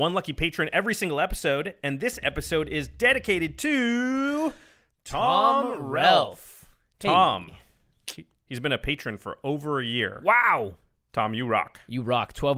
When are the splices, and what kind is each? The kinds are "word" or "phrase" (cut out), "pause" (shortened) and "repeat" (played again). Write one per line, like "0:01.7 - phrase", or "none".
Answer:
none